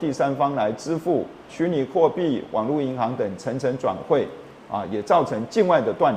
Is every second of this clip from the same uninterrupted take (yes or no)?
no